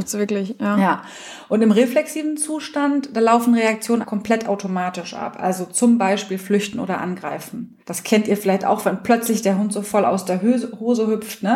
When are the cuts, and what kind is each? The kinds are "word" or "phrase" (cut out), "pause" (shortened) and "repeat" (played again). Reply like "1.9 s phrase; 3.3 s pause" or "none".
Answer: 4.0 s word; 7.8 s pause